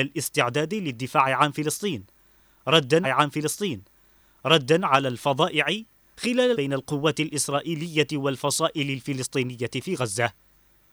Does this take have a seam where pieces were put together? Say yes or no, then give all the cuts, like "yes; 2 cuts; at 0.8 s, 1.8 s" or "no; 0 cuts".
yes; 2 cuts; at 3.0 s, 6.5 s